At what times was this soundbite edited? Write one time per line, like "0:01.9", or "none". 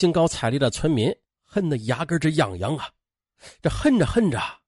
none

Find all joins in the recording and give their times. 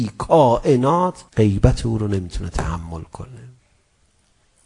0:01.3

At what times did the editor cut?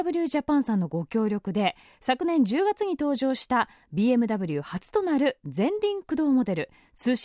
none

